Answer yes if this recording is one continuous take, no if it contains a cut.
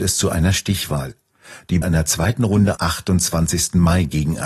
no